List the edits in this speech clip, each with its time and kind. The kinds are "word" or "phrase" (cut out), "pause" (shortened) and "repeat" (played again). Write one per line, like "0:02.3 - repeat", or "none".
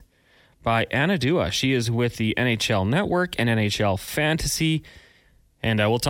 none